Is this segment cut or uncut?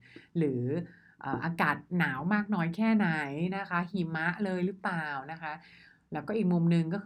uncut